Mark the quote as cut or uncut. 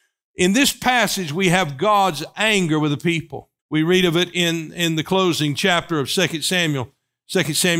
cut